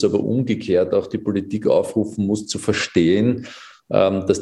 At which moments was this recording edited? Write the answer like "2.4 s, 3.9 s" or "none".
none